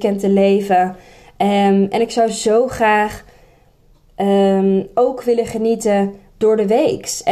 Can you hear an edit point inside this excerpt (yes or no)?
no